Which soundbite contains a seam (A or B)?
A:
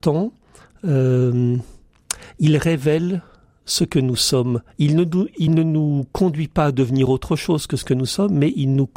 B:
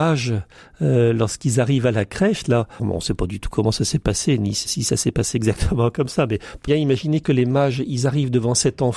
B